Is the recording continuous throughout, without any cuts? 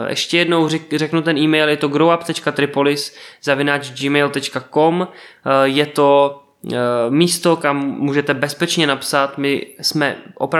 yes; 0 cuts

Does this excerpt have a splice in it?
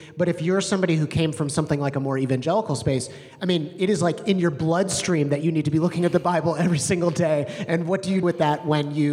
yes; 1 cut; at 8.2 s

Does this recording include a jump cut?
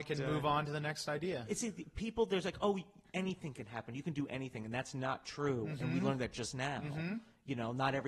yes; 1 cut; at 2.4 s

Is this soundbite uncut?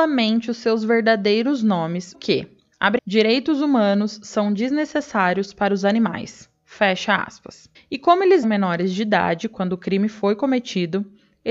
no; 4 cuts; at 2.1 s, 3.0 s, 7.7 s, 8.4 s

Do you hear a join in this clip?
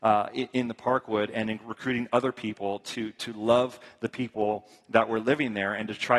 no; 0 cuts

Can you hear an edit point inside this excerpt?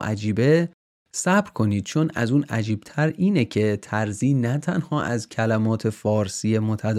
no; 0 cuts

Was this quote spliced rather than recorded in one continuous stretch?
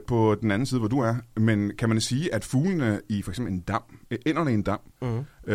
no; 0 cuts

